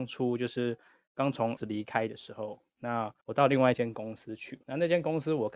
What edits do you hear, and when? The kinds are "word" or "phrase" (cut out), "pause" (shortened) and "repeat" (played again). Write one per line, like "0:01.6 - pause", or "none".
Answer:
0:01.6 - word
0:03.2 - pause
0:04.6 - pause